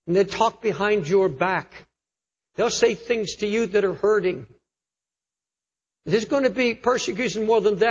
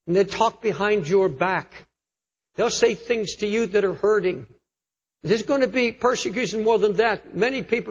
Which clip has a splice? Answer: second; 1 cut; at 4.9 s

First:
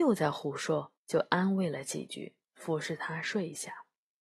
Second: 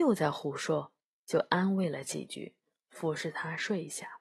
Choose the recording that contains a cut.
first; 2 cuts; at 1.0 s, 2.4 s

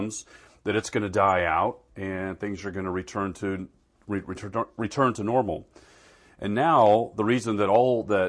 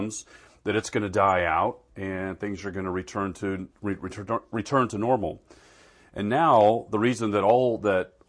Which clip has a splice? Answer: second; 1 cut; at 3.7 s

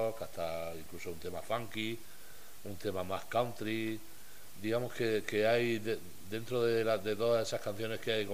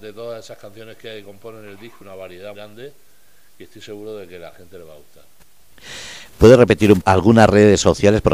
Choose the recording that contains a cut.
second; 3 cuts; at 2.0 s, 2.6 s, 7.0 s

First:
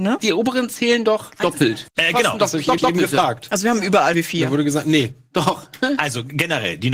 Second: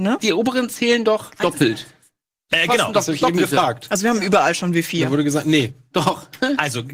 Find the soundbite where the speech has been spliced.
first; 3 cuts; at 1.9 s, 2.8 s, 4.1 s

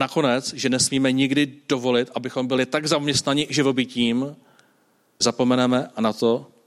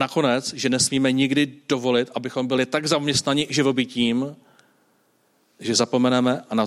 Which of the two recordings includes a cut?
first; 1 cut; at 5.2 s

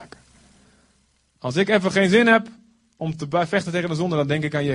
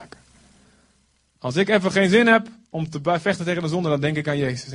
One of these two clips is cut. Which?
second; 1 cut; at 2.6 s

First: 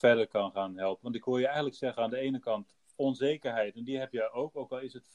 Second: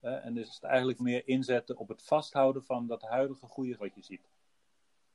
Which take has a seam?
second; 2 cuts; at 1.0 s, 3.8 s

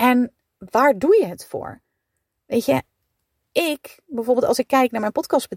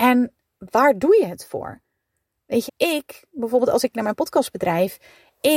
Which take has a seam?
second; 2 cuts; at 2.7 s, 3.9 s

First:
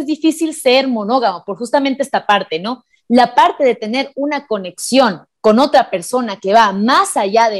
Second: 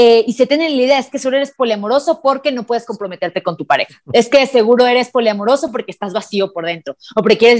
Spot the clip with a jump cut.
first; 1 cut; at 5.4 s

